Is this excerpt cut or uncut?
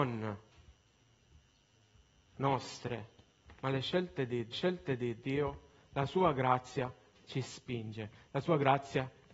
cut